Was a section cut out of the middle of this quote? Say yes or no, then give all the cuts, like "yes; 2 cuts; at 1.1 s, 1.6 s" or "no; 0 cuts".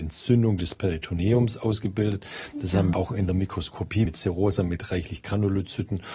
yes; 2 cuts; at 2.9 s, 4.1 s